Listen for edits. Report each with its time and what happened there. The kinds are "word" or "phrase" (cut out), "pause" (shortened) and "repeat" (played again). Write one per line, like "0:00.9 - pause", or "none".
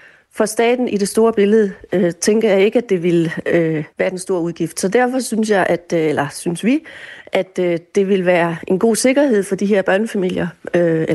0:03.9 - pause